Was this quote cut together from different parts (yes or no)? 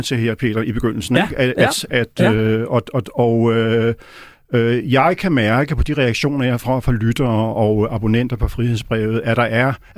no